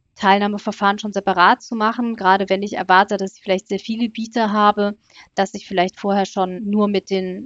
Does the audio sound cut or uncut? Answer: uncut